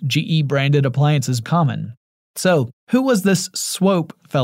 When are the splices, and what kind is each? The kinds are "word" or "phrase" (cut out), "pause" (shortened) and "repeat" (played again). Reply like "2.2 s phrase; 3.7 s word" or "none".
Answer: 1.4 s phrase; 2.8 s pause